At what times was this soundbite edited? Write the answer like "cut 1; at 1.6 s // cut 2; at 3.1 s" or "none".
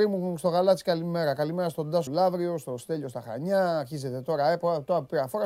cut 1; at 2.1 s